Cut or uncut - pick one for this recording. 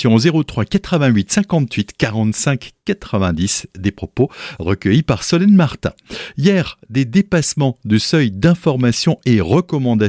uncut